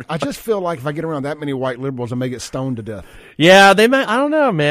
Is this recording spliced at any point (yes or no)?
no